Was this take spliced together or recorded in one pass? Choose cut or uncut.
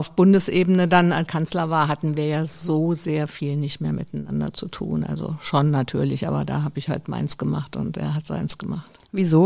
cut